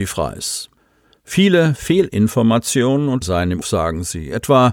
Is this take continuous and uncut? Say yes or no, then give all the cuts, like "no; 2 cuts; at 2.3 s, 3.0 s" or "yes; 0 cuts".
no; 2 cuts; at 3.2 s, 3.6 s